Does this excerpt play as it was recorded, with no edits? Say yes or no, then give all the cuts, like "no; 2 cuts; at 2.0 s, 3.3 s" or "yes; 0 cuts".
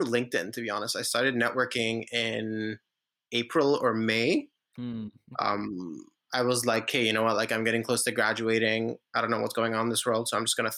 yes; 0 cuts